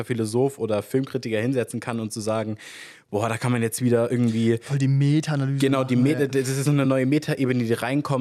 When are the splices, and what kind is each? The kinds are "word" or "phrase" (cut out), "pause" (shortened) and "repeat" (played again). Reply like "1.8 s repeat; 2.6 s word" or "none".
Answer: none